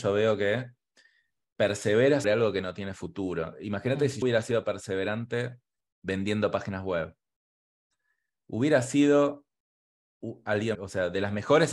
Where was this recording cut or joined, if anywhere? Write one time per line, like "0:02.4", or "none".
0:02.2
0:04.2
0:10.7

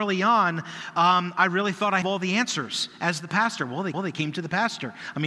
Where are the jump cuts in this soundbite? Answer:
0:02.0
0:03.9

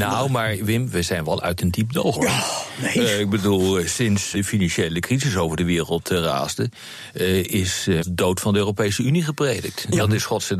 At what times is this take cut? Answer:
0:02.1
0:04.3
0:08.0

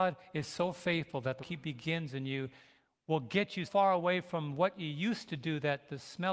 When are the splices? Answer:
0:01.4
0:03.7

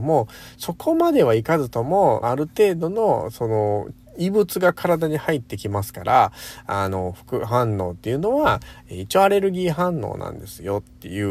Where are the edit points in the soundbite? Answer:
0:02.2

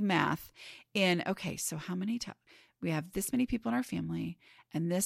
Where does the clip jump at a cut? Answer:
none

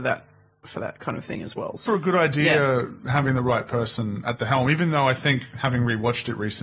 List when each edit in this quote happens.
0:01.8

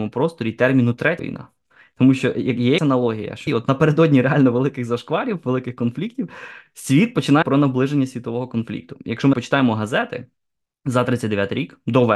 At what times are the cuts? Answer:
0:01.2
0:02.8
0:03.5
0:07.4
0:09.3

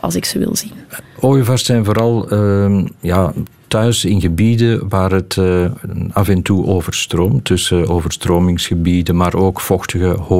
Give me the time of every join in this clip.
none

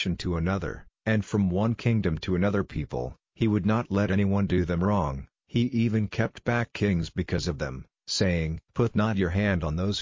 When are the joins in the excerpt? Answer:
0:08.7

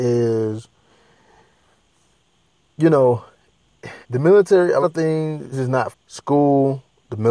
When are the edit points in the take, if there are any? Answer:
0:04.0
0:04.8
0:05.5
0:05.9

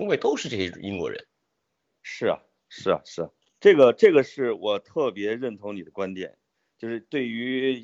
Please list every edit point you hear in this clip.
0:03.5

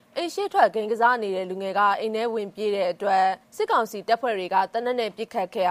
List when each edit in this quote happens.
0:03.4

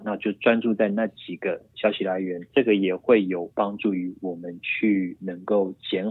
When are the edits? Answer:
0:02.5

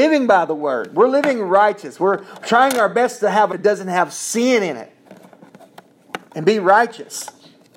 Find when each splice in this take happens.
0:03.5

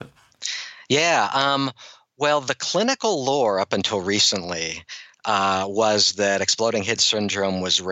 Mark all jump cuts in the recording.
none

